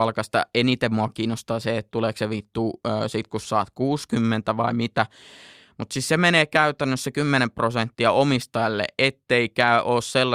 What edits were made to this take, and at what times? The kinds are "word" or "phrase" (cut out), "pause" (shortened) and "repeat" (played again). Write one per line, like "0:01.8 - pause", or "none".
none

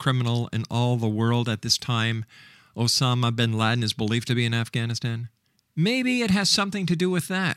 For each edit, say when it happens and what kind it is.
0:05.4 - pause

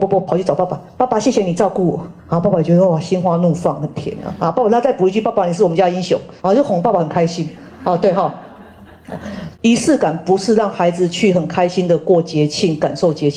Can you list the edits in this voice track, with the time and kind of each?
0:02.2 - pause
0:06.4 - pause
0:09.5 - pause

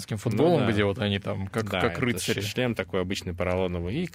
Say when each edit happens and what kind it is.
none

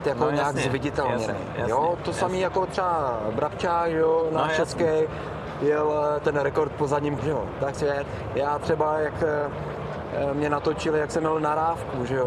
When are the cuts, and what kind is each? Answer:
0:07.2 - word
0:07.7 - phrase

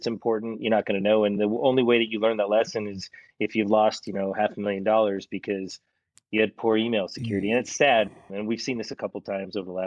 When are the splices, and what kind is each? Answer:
none

